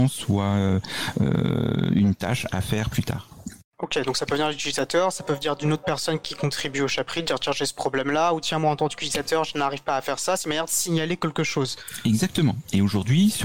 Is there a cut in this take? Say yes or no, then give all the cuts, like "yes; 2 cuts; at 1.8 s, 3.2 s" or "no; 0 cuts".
no; 0 cuts